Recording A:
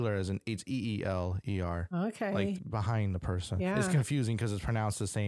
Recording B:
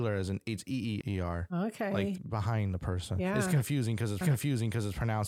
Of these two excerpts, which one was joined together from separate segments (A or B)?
B